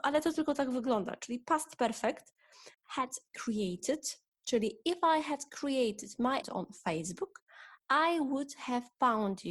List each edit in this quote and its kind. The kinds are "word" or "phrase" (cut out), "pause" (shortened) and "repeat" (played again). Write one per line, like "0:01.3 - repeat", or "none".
0:02.7 - pause
0:06.4 - word
0:07.8 - pause